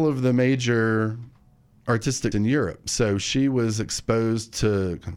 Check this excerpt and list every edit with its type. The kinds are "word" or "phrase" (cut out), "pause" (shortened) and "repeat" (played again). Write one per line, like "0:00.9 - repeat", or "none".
0:02.3 - word